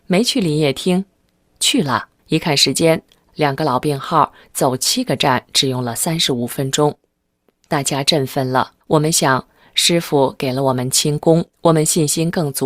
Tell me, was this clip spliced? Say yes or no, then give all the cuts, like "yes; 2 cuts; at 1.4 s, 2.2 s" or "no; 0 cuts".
yes; 3 cuts; at 2.2 s, 8.8 s, 11.5 s